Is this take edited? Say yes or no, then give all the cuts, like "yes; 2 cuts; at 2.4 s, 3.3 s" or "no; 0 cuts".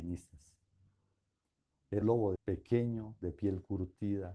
yes; 2 cuts; at 2.0 s, 2.4 s